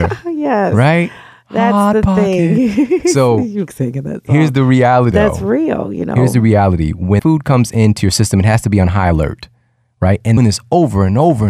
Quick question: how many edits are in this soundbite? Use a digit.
4